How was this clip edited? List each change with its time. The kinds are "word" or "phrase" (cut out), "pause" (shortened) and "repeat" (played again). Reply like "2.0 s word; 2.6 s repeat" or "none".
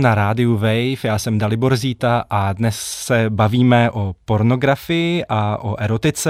none